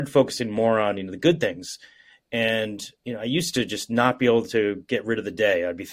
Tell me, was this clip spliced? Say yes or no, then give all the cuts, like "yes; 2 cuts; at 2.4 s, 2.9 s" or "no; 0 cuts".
yes; 1 cut; at 3.0 s